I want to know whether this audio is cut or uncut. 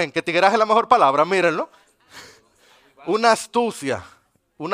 uncut